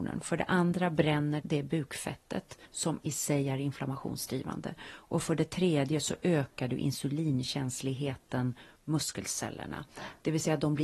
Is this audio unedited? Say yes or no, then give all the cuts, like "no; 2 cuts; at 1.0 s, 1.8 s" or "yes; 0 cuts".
no; 3 cuts; at 1.4 s, 2.7 s, 8.8 s